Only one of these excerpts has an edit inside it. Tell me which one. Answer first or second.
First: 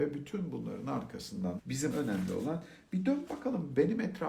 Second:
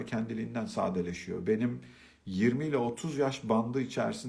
first